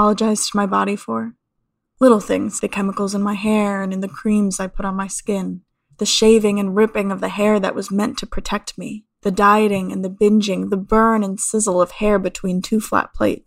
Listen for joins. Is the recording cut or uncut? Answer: cut